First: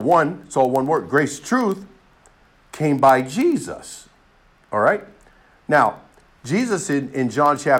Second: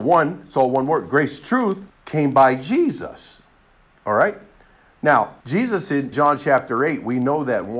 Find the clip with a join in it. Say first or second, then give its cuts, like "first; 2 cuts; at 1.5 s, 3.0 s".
second; 3 cuts; at 1.9 s, 5.4 s, 6.1 s